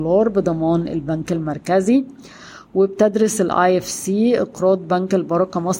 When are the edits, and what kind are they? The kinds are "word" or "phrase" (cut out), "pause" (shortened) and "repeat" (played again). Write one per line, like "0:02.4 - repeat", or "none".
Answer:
none